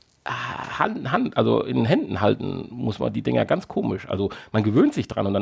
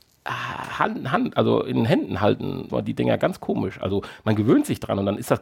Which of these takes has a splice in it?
second; 1 cut; at 2.7 s

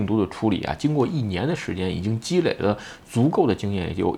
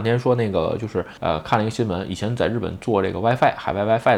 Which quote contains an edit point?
second; 1 cut; at 1.2 s

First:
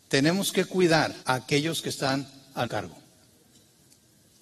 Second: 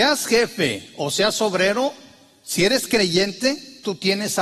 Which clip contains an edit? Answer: first; 2 cuts; at 1.2 s, 2.7 s

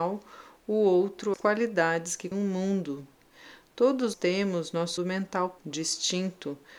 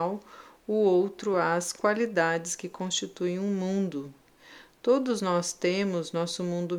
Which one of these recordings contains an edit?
first; 5 cuts; at 1.3 s, 2.3 s, 4.1 s, 5.0 s, 5.6 s

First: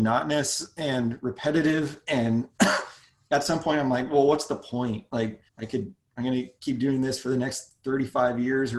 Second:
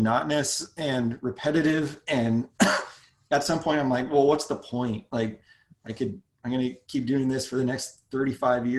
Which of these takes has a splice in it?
first; 1 cut; at 5.5 s

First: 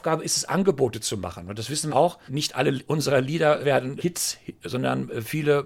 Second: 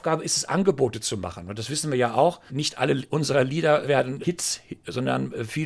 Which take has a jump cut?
first; 1 cut; at 1.9 s

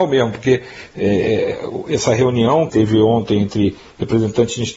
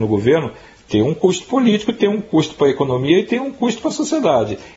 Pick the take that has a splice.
first; 1 cut; at 2.7 s

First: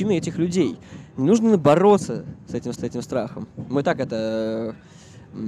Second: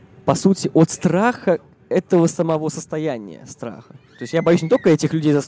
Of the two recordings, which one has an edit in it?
first; 1 cut; at 2.8 s

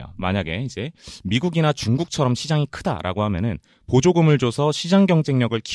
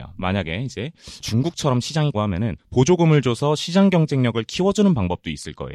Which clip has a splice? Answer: second; 3 cuts; at 1.2 s, 2.1 s, 2.6 s

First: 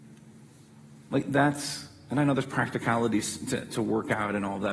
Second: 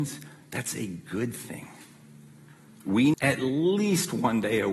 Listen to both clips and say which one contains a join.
second; 1 cut; at 3.1 s

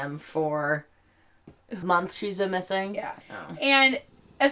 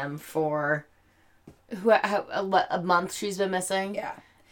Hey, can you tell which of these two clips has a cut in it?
first; 2 cuts; at 1.8 s, 3.2 s

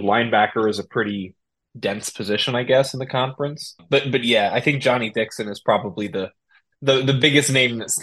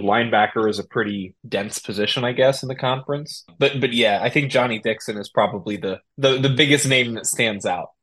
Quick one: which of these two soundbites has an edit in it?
second; 2 cuts; at 1.4 s, 6.1 s

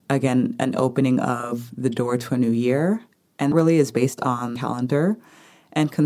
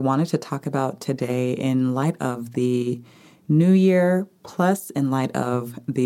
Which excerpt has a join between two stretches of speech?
first; 2 cuts; at 3.5 s, 4.6 s

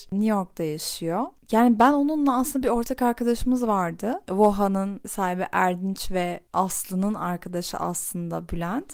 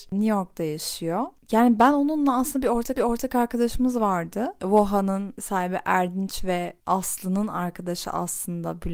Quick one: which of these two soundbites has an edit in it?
second; 1 cut; at 3.0 s

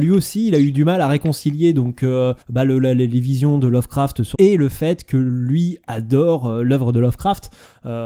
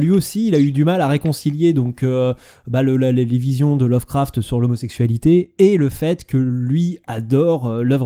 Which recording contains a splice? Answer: first; 2 cuts; at 2.4 s, 4.3 s

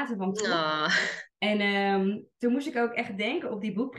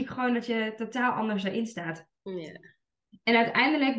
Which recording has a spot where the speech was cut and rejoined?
first; 2 cuts; at 1.3 s, 2.3 s

